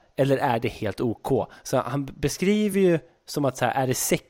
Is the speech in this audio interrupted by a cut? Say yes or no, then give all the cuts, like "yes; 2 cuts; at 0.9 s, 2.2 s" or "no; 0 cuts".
no; 0 cuts